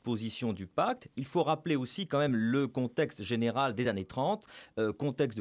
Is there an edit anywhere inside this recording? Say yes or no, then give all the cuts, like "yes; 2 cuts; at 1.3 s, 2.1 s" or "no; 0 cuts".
no; 0 cuts